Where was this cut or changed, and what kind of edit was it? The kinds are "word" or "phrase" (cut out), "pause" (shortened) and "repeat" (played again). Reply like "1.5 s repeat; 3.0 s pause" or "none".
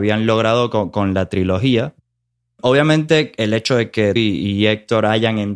4.2 s word